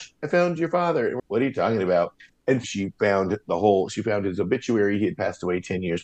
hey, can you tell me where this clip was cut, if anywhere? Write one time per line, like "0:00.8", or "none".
0:01.2
0:02.6